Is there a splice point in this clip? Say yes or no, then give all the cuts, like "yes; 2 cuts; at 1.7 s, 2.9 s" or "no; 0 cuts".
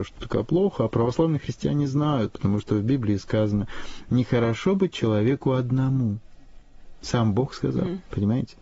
no; 0 cuts